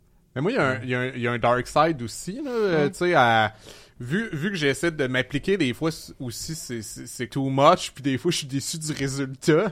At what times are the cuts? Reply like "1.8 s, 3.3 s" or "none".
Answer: 7.3 s